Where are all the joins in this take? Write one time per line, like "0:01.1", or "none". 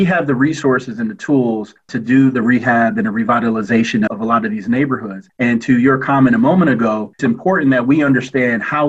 0:04.1
0:07.2